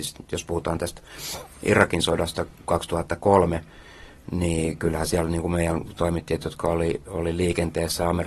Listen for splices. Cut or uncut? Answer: uncut